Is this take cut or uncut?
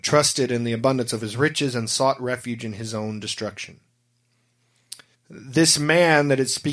cut